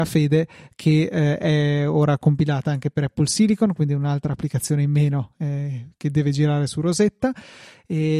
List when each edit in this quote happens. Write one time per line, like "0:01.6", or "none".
none